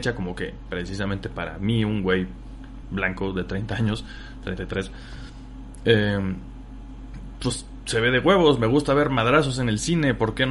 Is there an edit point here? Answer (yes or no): no